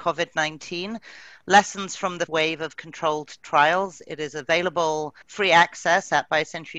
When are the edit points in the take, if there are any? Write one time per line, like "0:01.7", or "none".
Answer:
0:02.3
0:05.2